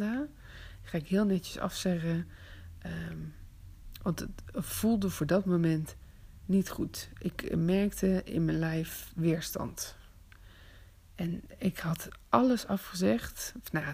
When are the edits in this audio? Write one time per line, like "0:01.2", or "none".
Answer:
none